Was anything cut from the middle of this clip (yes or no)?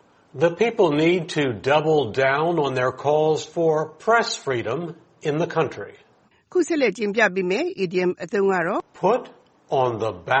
no